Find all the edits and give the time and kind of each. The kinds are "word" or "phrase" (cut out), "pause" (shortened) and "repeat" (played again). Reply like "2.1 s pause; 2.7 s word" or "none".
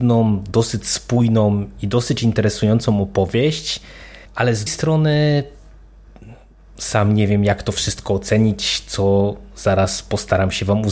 4.2 s pause; 4.7 s word